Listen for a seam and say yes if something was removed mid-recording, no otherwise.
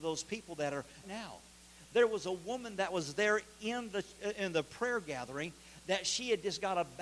yes